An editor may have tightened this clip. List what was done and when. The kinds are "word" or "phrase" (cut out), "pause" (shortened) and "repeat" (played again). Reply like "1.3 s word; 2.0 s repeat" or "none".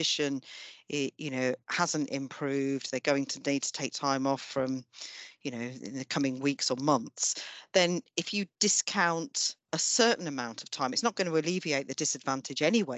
1.6 s pause; 9.6 s pause